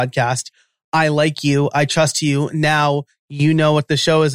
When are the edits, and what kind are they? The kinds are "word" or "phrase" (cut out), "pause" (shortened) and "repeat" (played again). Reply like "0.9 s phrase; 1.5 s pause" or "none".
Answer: none